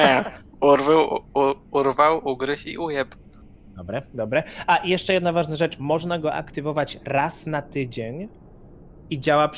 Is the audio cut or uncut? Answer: uncut